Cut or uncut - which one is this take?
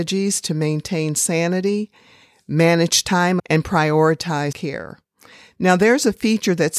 cut